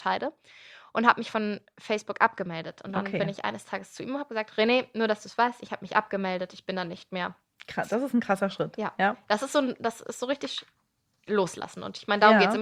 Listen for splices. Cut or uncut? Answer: uncut